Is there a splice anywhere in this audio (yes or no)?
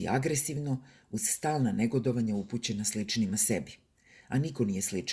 no